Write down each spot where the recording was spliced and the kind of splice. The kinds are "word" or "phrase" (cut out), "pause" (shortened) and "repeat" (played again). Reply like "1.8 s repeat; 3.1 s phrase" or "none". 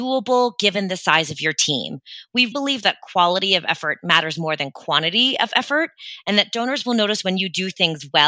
2.5 s word